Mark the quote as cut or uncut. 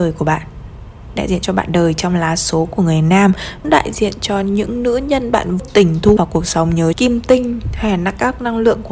cut